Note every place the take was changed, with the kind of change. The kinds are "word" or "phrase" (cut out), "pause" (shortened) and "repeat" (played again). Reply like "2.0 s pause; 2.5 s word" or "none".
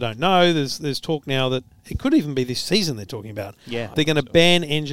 3.9 s word